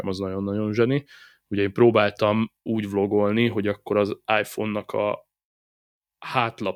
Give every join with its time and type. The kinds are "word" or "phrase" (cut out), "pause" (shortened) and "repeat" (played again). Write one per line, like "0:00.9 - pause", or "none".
0:02.7 - word